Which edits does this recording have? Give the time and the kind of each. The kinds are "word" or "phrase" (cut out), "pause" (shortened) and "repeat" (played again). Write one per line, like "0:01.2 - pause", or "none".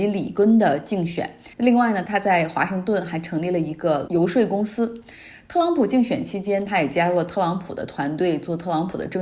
0:01.5 - pause
0:04.1 - word